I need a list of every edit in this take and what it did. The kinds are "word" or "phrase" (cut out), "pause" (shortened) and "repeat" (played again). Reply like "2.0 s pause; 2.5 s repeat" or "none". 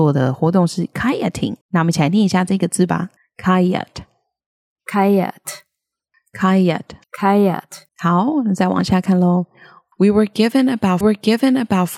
1.6 s pause; 3.2 s pause; 7.0 s pause; 7.9 s pause; 11.0 s repeat